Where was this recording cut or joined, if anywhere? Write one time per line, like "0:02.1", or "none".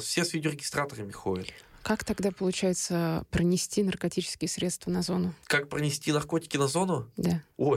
0:05.4

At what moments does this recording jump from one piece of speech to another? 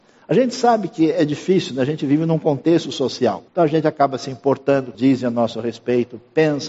0:03.5
0:04.9

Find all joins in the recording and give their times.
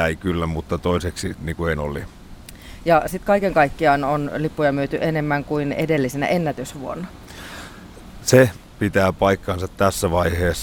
0:01.4
0:01.7

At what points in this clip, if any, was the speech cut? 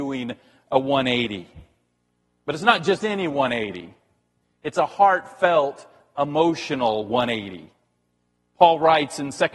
0:02.2

